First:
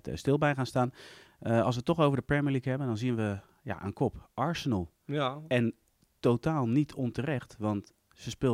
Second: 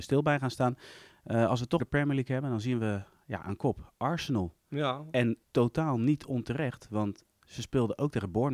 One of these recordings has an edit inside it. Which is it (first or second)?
second